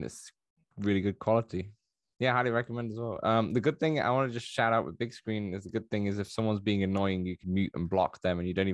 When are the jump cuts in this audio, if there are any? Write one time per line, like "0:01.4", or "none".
0:07.4

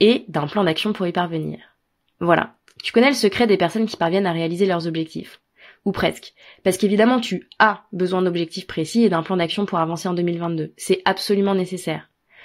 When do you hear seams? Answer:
none

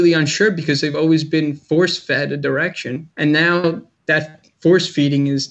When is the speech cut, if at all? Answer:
0:03.1
0:04.0

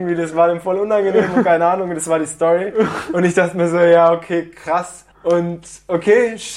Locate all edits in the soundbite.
0:05.1

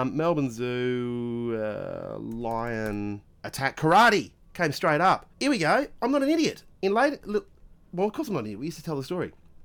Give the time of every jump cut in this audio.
0:03.3
0:05.3
0:07.8

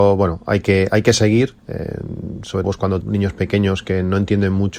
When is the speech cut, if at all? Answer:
0:01.6
0:02.6
0:03.0

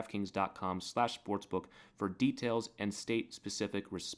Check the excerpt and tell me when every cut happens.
none

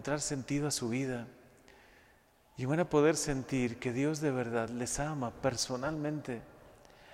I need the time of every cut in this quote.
none

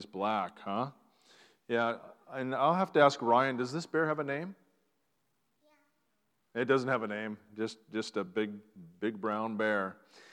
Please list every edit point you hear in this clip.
none

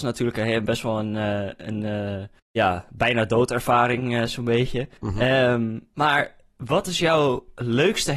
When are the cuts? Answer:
0:02.4
0:05.0

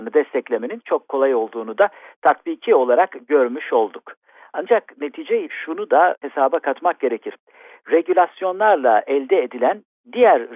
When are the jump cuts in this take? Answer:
0:05.5

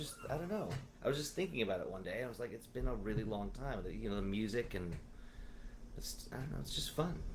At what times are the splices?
0:00.9

